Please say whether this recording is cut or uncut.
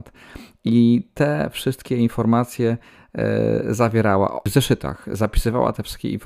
uncut